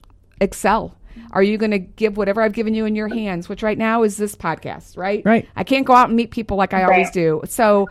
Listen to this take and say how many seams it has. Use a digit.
0